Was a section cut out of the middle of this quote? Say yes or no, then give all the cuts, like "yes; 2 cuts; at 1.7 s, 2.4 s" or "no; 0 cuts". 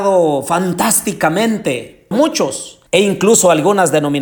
yes; 2 cuts; at 2.1 s, 2.9 s